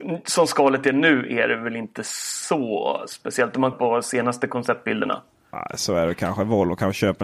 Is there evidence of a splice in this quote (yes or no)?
yes